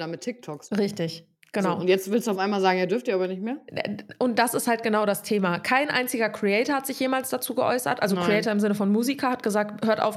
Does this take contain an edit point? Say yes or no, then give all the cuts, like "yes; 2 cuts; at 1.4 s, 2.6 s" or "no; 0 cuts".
no; 0 cuts